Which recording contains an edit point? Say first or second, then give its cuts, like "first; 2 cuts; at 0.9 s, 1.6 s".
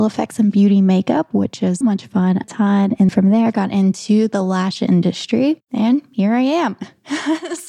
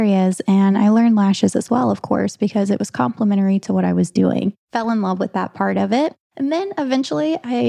first; 3 cuts; at 1.8 s, 2.4 s, 3.1 s